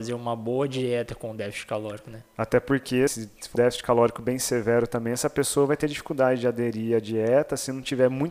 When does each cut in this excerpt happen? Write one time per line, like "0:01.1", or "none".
0:03.1
0:03.5